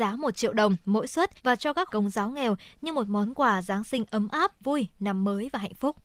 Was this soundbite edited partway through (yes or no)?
yes